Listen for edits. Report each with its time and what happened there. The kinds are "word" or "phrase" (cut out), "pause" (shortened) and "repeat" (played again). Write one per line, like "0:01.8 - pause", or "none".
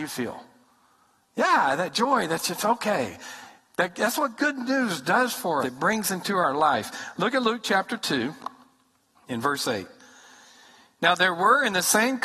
0:05.6 - word